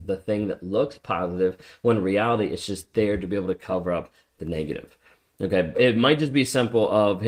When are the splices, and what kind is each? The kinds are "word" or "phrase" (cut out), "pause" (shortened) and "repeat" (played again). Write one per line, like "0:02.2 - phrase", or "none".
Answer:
0:05.7 - word